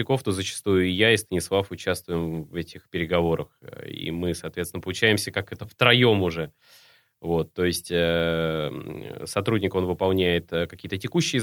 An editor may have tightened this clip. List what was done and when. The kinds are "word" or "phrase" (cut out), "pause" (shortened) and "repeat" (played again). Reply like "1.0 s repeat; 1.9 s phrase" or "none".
none